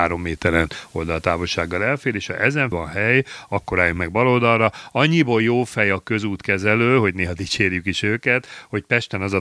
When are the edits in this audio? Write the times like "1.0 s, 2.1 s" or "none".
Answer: 2.7 s